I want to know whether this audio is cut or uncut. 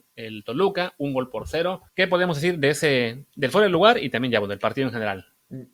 cut